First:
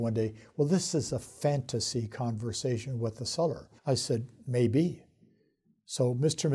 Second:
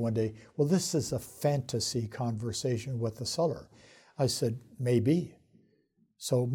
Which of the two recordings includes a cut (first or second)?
first